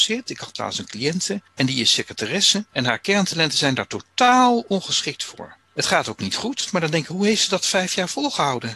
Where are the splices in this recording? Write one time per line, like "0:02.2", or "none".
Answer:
0:05.6